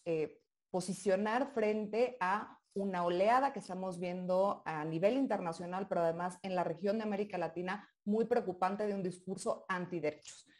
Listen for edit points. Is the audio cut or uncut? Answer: uncut